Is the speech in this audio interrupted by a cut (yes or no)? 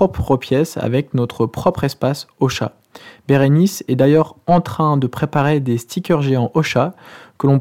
no